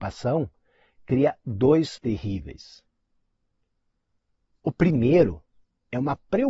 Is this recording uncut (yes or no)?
no